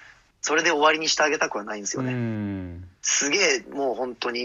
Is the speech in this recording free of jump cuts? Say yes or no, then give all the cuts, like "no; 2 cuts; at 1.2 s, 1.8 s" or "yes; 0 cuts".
no; 1 cut; at 3.0 s